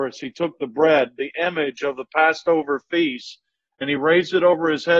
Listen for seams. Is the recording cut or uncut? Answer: uncut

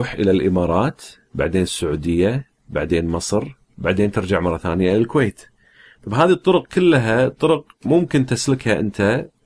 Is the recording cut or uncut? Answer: uncut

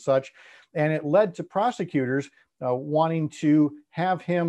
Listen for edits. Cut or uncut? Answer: uncut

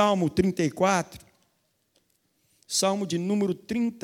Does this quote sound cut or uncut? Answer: uncut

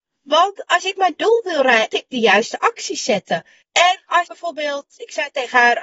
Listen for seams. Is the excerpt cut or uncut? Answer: cut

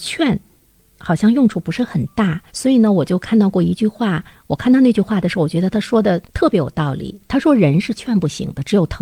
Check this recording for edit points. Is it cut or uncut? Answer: cut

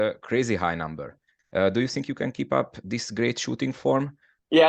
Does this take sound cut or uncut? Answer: uncut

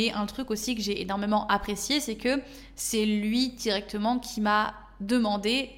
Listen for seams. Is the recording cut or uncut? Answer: uncut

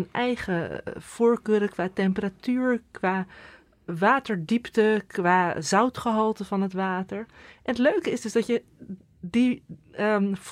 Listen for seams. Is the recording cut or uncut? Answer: uncut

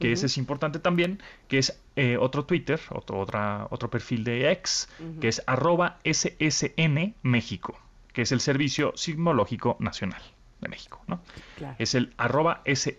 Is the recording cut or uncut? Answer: uncut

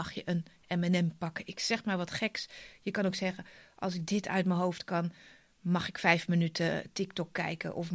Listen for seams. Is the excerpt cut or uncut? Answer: uncut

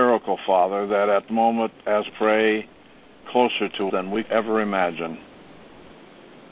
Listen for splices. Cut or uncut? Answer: cut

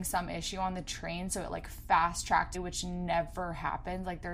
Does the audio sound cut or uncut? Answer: cut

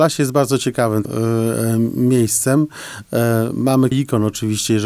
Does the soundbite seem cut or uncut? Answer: cut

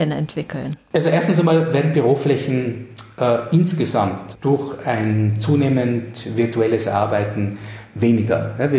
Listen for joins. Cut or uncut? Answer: cut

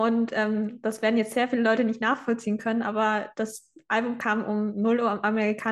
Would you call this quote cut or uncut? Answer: uncut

